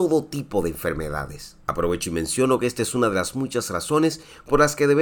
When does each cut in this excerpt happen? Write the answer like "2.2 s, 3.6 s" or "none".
1.6 s